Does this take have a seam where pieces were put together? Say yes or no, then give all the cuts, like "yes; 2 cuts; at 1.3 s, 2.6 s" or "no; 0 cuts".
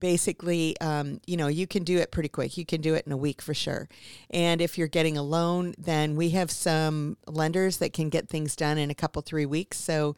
yes; 1 cut; at 7.2 s